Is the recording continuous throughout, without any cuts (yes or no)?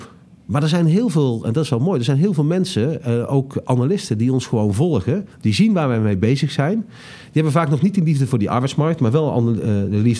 no